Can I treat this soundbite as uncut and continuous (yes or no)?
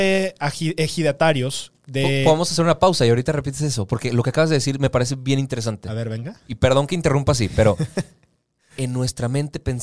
yes